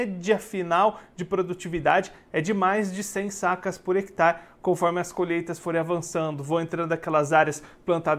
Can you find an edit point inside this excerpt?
no; 0 cuts

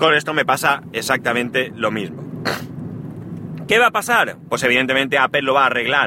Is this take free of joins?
yes; 0 cuts

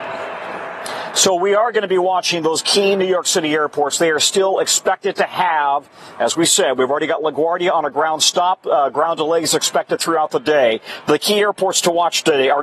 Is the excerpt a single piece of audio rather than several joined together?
yes; 0 cuts

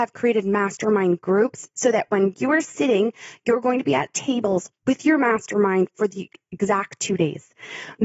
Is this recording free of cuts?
yes; 0 cuts

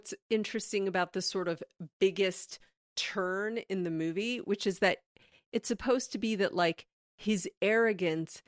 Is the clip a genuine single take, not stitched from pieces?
yes; 0 cuts

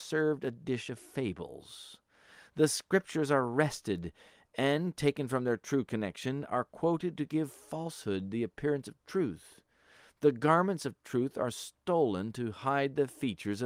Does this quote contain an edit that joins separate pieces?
no; 0 cuts

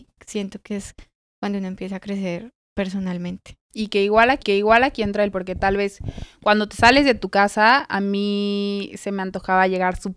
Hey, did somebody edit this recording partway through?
yes; 3 cuts; at 2.6 s, 4.4 s, 5.3 s

